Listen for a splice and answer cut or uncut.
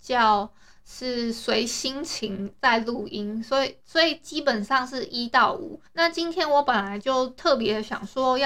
cut